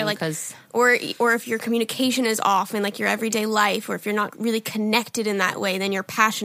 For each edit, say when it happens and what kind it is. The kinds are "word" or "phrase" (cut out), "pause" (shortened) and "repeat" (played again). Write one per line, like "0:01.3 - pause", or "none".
0:04.3 - word